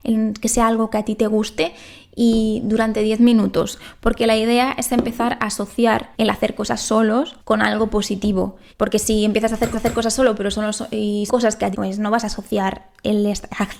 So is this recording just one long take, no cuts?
no; 6 cuts; at 6.1 s, 7.4 s, 8.7 s, 9.7 s, 11.3 s, 11.7 s

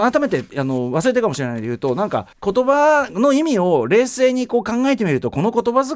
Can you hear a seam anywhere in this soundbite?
yes; 1 cut; at 2.3 s

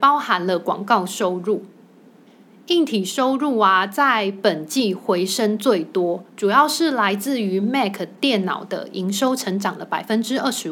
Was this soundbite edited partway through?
no; 0 cuts

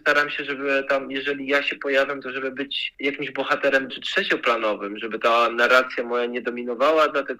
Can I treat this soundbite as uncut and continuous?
no; 1 cut; at 3.9 s

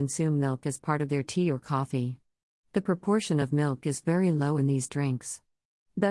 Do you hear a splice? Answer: no; 0 cuts

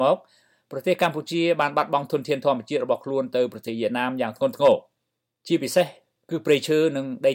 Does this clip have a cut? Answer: no; 0 cuts

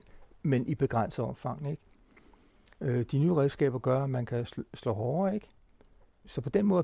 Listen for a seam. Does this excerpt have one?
no; 0 cuts

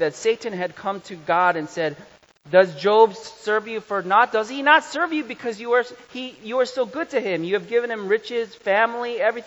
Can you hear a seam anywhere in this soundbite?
no; 0 cuts

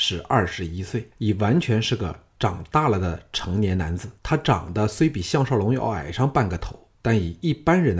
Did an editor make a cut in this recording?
yes; 3 cuts; at 1.1 s, 4.2 s, 6.9 s

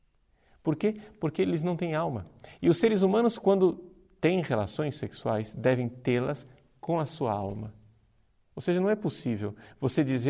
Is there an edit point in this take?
no; 0 cuts

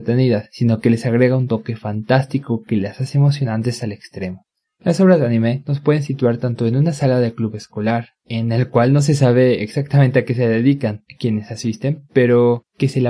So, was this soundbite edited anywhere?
no; 0 cuts

